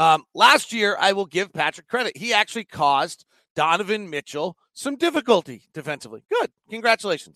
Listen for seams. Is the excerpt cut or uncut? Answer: cut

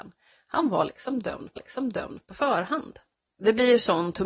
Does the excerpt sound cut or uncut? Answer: cut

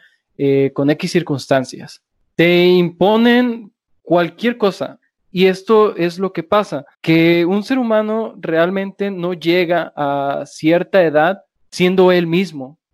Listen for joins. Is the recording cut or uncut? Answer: cut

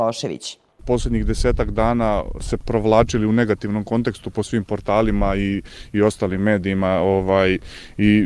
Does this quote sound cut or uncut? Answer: cut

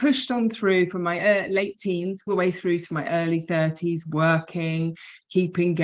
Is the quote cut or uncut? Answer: cut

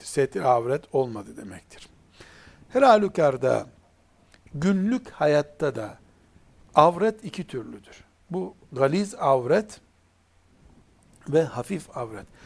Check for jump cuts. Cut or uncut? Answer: uncut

